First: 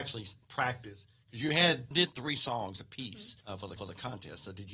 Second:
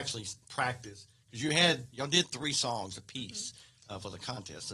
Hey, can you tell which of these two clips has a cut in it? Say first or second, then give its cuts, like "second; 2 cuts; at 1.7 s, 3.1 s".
first; 3 cuts; at 1.9 s, 3.4 s, 3.8 s